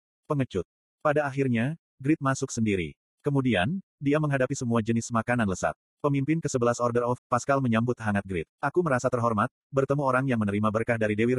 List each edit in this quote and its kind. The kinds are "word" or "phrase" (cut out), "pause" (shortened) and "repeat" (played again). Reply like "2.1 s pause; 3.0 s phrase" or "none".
7.2 s word; 8.5 s pause